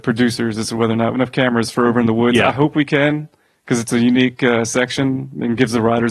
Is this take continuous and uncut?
no; 1 cut; at 1.1 s

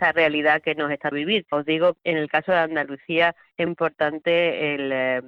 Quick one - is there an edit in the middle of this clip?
yes; 4 cuts; at 1.1 s, 1.5 s, 2.0 s, 3.7 s

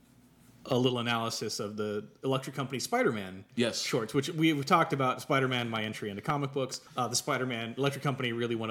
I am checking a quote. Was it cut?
yes; 1 cut; at 6.9 s

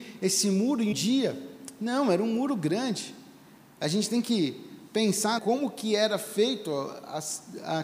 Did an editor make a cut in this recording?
yes; 2 cuts; at 0.9 s, 5.4 s

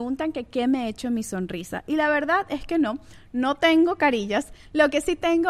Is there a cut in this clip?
no; 0 cuts

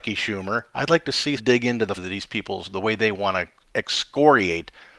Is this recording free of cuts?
no; 2 cuts; at 1.4 s, 2.0 s

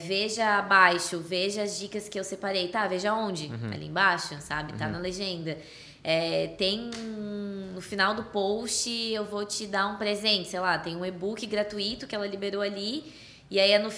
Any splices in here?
no; 0 cuts

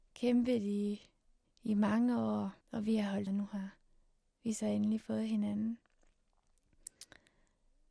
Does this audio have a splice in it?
yes; 3 cuts; at 1.4 s, 2.6 s, 3.3 s

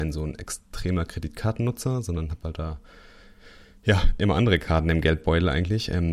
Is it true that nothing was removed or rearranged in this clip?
yes; 0 cuts

